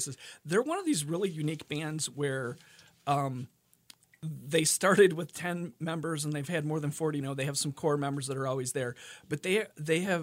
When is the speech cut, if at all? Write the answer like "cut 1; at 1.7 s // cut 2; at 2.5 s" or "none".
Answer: cut 1; at 7.2 s